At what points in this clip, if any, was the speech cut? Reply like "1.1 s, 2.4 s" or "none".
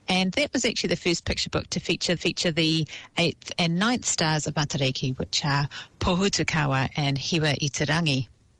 2.2 s